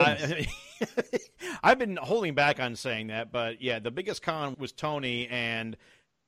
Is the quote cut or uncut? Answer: cut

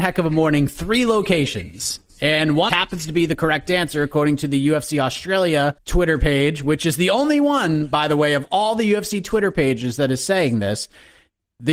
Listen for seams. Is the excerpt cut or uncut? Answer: cut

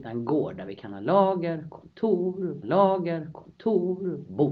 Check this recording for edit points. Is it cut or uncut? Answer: cut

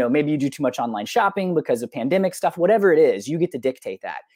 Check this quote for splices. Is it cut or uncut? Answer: uncut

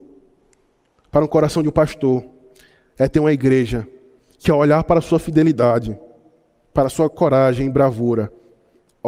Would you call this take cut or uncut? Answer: uncut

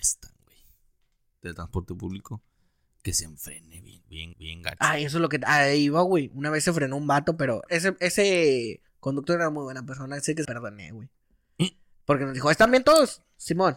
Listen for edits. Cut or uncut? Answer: cut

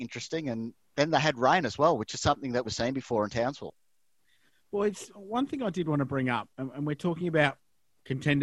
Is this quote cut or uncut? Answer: cut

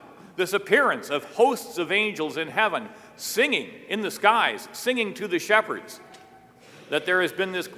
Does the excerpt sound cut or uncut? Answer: uncut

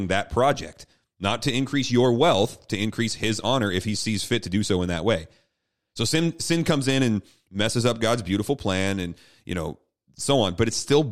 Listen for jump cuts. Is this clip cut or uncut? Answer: uncut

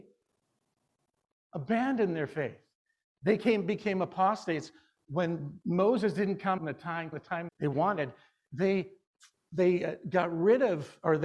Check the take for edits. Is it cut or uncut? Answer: cut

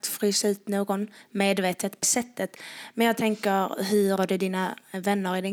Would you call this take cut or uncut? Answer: cut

